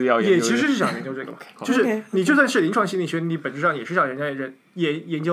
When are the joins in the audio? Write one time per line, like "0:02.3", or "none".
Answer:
0:01.6

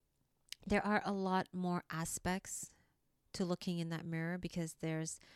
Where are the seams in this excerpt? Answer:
none

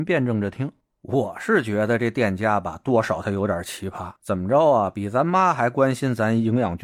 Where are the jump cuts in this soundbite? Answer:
0:04.2

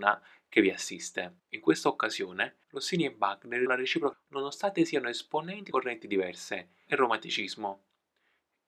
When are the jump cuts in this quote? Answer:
0:01.4
0:02.6
0:03.7
0:04.1
0:05.7
0:06.9

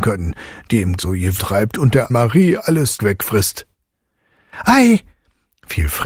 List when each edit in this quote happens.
0:01.0
0:01.4
0:02.1
0:03.0

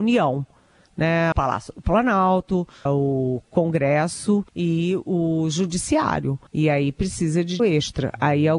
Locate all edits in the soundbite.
0:01.3
0:02.9
0:04.5
0:06.5
0:07.6

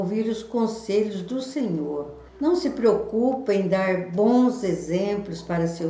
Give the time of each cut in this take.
0:02.3

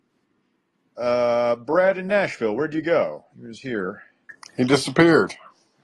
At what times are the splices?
0:03.3

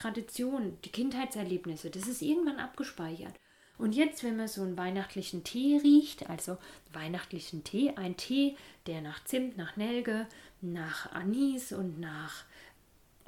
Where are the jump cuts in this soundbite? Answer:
none

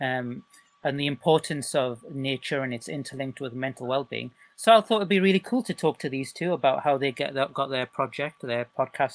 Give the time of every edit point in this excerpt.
none

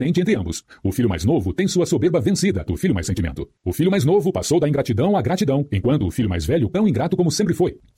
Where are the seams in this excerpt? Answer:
0:02.7
0:03.0
0:03.6
0:06.7

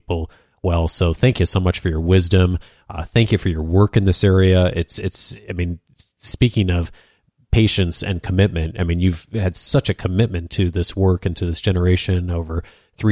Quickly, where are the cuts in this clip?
none

